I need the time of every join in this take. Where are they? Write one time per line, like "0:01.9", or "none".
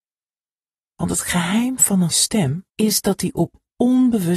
0:02.1
0:02.7